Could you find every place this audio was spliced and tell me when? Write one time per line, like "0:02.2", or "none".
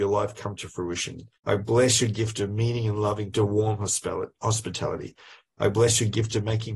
0:01.4
0:03.3